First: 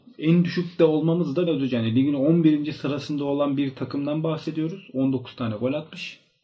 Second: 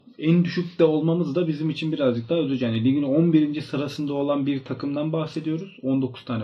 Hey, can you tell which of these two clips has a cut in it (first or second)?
first